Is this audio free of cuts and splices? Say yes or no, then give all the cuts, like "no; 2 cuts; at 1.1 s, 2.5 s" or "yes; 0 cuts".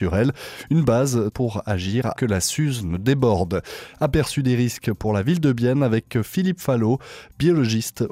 no; 2 cuts; at 1.3 s, 2.1 s